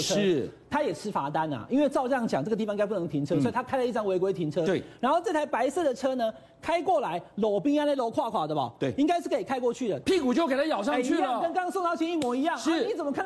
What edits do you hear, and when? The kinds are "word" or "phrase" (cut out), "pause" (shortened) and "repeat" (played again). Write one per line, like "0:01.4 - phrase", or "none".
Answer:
0:10.0 - phrase